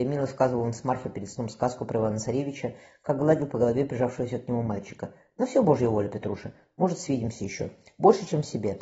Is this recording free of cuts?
yes; 0 cuts

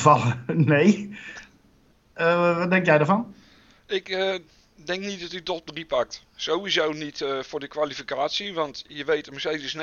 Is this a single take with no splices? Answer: yes; 0 cuts

